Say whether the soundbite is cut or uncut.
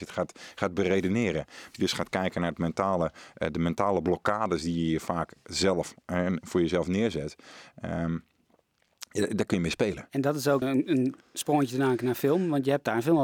cut